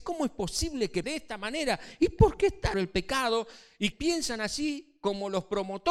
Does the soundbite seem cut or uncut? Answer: cut